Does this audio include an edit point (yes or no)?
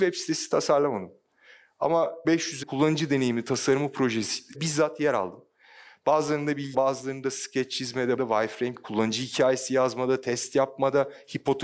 yes